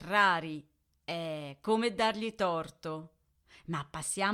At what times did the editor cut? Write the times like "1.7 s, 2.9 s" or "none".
none